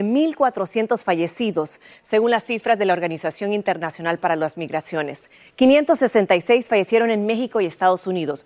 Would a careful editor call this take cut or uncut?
uncut